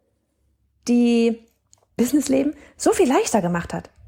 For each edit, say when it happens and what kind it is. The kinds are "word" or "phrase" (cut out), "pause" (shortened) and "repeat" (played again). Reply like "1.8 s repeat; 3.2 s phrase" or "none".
2.0 s phrase